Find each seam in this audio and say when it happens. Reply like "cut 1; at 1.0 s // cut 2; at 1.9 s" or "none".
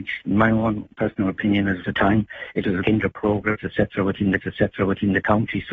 cut 1; at 1.8 s // cut 2; at 2.8 s // cut 3; at 4.4 s